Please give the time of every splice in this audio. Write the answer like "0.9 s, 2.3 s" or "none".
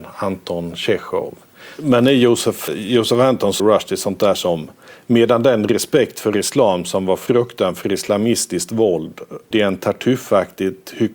2.7 s, 3.6 s, 9.5 s